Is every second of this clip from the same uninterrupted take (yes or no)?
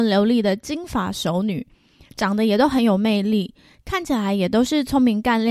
yes